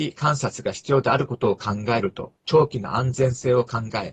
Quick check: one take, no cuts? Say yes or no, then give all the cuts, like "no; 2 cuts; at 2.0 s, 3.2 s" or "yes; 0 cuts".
no; 1 cut; at 2.4 s